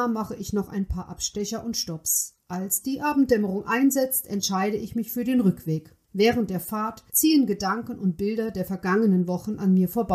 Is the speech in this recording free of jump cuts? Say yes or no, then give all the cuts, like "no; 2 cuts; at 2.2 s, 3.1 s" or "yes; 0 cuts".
no; 2 cuts; at 6.0 s, 7.1 s